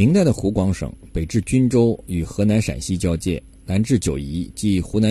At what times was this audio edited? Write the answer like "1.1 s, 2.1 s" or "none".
none